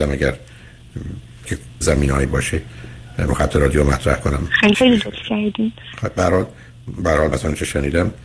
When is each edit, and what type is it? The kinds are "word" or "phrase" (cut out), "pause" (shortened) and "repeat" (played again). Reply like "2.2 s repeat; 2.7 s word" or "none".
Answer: 1.4 s word; 1.8 s phrase; 3.3 s word; 4.7 s phrase; 7.3 s word